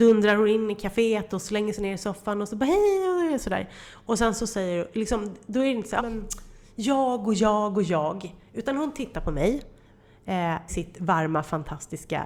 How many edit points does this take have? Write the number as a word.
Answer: two